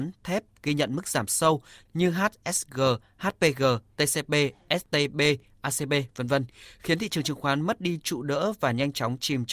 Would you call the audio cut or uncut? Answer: uncut